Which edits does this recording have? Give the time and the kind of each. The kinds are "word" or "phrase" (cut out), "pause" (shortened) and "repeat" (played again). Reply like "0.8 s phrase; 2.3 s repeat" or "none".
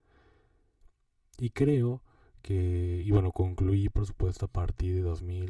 none